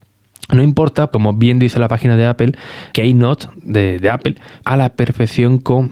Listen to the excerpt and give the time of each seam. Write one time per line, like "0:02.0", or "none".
0:01.1
0:02.9
0:04.6